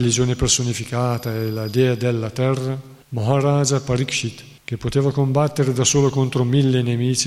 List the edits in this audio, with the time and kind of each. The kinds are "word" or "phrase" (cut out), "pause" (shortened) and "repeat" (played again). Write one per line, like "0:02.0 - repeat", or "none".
0:03.0 - pause
0:04.6 - pause